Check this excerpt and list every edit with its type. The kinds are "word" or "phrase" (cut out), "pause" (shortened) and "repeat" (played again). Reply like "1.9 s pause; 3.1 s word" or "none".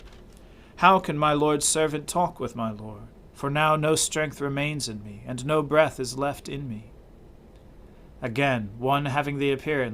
none